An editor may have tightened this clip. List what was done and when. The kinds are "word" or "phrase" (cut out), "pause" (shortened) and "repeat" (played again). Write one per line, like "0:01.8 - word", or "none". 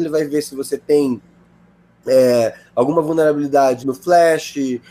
0:03.8 - word

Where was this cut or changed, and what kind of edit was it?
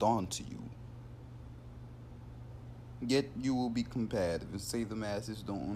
none

